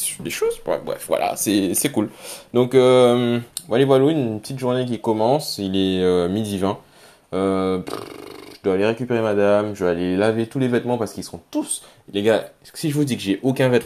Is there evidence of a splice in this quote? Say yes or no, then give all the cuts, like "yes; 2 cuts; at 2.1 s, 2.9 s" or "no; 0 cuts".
no; 0 cuts